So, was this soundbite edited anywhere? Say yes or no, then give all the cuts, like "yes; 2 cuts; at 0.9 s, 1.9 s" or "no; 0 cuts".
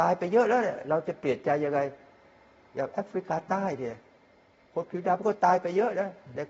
no; 0 cuts